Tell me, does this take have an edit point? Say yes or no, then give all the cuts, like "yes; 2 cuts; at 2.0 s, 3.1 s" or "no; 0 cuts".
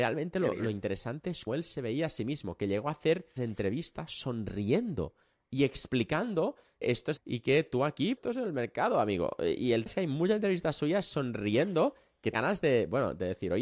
yes; 7 cuts; at 1.5 s, 3.4 s, 6.8 s, 7.2 s, 8.2 s, 9.9 s, 12.3 s